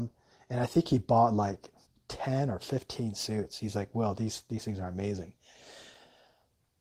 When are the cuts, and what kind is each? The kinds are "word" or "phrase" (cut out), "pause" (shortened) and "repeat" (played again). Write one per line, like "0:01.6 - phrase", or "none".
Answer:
0:01.9 - pause